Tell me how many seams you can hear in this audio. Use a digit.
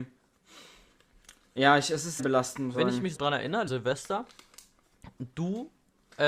4